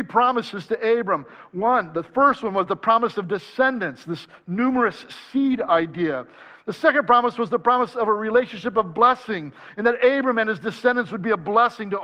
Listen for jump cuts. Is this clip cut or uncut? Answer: uncut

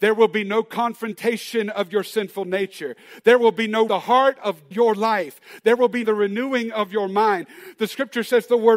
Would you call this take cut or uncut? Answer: cut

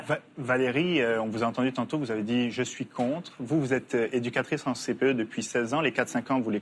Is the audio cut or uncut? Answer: uncut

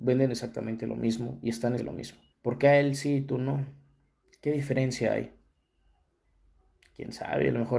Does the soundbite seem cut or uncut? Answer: cut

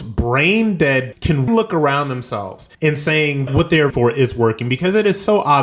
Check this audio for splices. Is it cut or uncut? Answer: cut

